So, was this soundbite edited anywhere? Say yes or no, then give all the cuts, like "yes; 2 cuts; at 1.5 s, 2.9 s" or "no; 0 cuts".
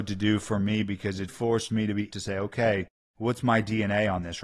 yes; 2 cuts; at 1.3 s, 2.1 s